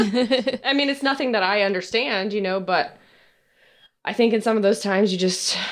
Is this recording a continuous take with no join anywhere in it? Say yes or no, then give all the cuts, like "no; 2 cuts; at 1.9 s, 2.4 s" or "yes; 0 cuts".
yes; 0 cuts